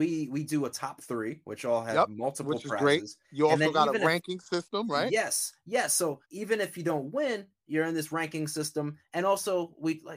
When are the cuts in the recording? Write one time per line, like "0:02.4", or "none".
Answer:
0:03.2
0:06.2